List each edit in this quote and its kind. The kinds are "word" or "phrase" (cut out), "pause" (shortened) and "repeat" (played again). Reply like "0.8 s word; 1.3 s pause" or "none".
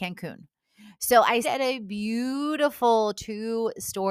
1.4 s word